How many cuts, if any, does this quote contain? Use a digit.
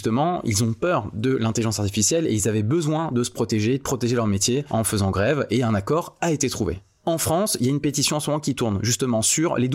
0